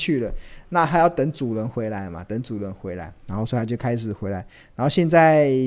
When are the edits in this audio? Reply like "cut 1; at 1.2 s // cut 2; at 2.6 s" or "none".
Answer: none